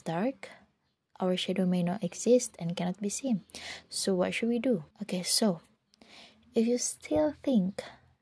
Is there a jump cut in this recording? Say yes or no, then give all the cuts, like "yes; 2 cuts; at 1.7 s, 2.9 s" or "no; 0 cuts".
yes; 1 cut; at 4.9 s